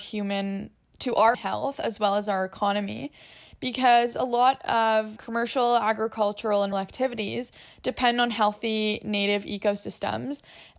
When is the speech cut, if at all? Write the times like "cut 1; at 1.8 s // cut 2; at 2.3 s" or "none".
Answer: cut 1; at 1.3 s // cut 2; at 5.2 s // cut 3; at 6.7 s